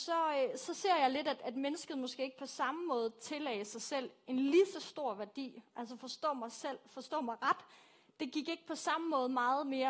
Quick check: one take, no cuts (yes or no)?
yes